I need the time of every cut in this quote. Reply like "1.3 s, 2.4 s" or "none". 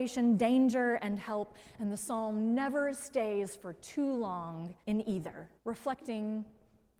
4.8 s, 5.6 s